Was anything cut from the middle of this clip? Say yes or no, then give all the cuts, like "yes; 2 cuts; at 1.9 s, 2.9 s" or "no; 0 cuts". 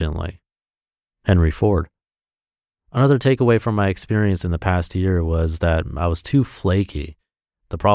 no; 0 cuts